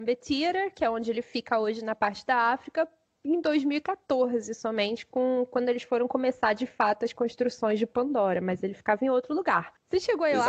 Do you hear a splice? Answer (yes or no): no